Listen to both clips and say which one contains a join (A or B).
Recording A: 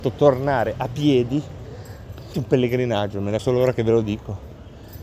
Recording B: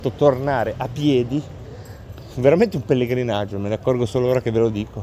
A